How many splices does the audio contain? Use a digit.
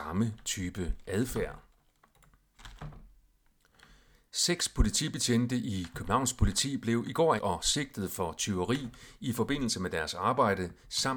1